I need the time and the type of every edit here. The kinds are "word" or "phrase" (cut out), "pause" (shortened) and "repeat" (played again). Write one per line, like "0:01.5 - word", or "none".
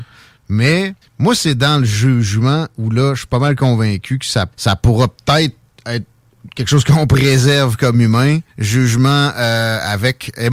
0:01.0 - pause
0:04.5 - pause
0:05.2 - pause
0:08.5 - pause